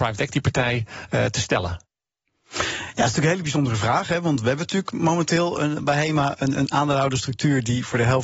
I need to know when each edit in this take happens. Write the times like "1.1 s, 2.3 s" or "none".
none